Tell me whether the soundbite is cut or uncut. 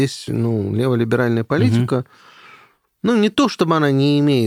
uncut